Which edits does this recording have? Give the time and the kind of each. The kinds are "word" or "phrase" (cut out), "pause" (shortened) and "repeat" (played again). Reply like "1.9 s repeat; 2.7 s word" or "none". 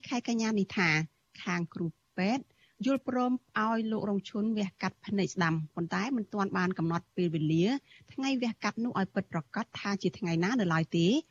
none